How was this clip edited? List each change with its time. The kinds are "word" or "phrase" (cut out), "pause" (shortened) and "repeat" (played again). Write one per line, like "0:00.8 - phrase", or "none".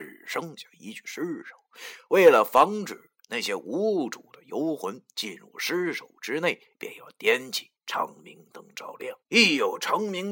0:07.8 - pause
0:09.2 - pause